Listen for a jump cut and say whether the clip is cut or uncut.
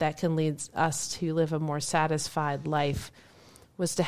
uncut